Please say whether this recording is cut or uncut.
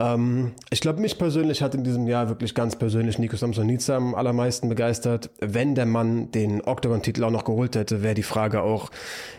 uncut